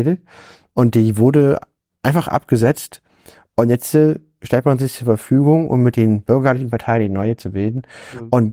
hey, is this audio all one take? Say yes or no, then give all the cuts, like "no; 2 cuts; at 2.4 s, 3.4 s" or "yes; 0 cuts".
yes; 0 cuts